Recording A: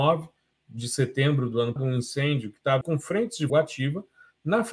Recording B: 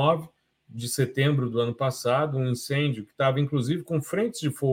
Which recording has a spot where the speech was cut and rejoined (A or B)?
A